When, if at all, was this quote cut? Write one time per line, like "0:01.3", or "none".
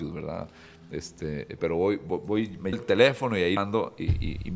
0:01.6
0:02.7
0:03.6